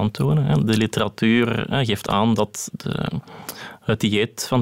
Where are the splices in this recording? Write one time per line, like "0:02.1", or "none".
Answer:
0:02.7

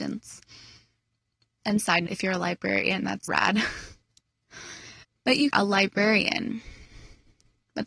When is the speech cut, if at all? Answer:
0:02.1
0:03.3
0:05.0
0:05.5

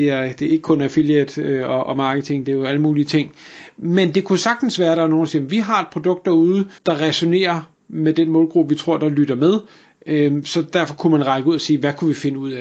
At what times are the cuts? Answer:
0:06.8

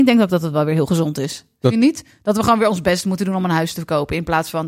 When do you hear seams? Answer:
none

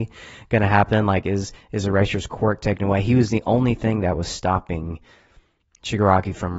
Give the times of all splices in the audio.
none

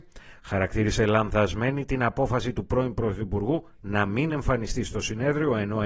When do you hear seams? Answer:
none

